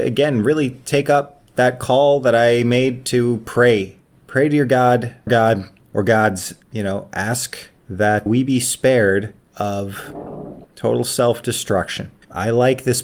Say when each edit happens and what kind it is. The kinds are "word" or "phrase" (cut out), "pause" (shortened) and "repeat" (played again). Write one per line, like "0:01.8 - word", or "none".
0:05.3 - word
0:06.6 - pause
0:08.3 - word